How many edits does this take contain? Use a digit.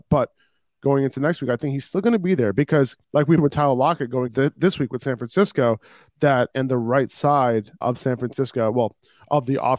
5